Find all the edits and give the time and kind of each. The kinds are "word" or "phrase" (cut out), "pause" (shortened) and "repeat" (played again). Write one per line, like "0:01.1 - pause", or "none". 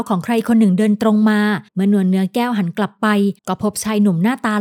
0:01.7 - pause
0:03.4 - pause